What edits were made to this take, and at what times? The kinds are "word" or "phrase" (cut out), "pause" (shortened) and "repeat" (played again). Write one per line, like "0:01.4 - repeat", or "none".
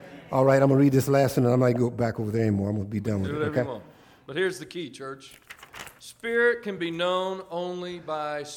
none